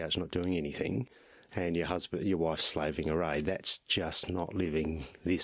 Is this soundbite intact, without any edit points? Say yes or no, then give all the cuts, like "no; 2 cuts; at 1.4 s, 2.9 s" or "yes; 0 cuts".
yes; 0 cuts